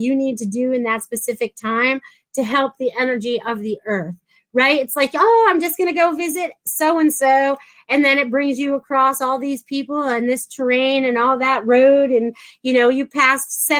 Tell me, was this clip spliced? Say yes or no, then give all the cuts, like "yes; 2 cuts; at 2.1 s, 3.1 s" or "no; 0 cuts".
no; 0 cuts